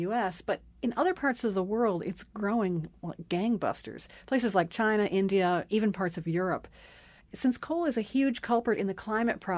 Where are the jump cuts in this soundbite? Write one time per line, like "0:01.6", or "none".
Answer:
none